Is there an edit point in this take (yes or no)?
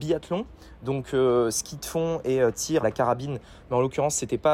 yes